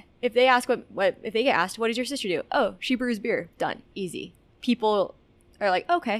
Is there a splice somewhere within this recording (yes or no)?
yes